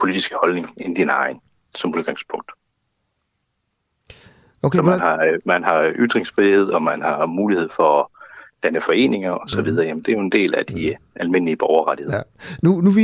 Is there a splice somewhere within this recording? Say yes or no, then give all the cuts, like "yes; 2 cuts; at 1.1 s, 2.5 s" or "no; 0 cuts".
no; 0 cuts